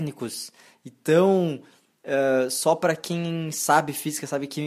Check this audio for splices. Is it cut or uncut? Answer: uncut